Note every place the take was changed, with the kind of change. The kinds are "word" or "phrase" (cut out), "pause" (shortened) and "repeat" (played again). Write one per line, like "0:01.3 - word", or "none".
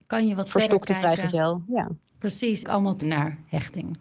0:02.6 - phrase
0:03.0 - word